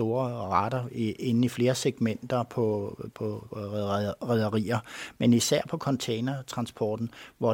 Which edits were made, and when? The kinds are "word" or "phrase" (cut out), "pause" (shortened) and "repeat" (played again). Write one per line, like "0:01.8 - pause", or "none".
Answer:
none